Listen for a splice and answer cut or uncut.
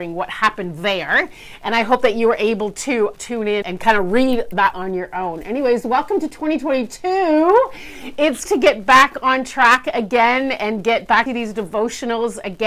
cut